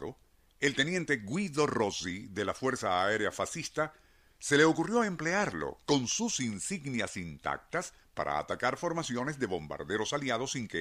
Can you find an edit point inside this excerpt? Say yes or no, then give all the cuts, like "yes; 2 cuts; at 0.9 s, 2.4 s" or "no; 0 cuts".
no; 0 cuts